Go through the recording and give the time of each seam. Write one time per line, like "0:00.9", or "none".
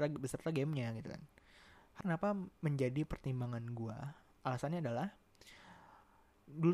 0:02.0
0:02.5
0:04.3